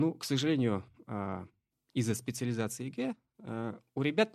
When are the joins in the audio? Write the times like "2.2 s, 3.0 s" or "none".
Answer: none